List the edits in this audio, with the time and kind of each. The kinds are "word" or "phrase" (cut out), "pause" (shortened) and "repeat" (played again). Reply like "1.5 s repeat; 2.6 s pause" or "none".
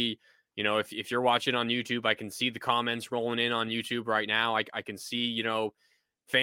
none